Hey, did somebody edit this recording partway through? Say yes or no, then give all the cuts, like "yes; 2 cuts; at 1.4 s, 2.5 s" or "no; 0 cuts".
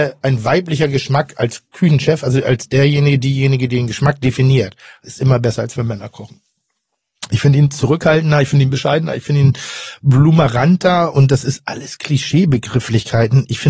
no; 0 cuts